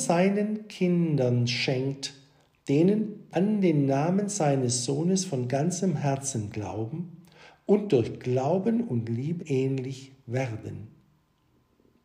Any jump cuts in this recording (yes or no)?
yes